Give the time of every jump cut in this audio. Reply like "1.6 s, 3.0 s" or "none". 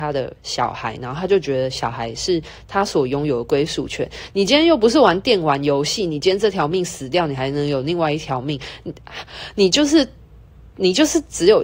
none

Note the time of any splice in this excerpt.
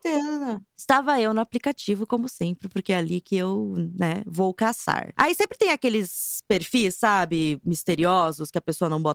none

